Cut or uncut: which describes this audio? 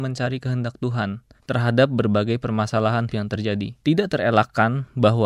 cut